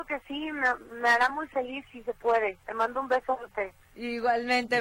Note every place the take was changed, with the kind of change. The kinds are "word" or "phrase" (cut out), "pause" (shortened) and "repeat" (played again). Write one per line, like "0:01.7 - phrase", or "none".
none